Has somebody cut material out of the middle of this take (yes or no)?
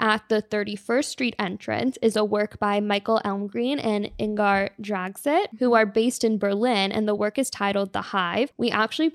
no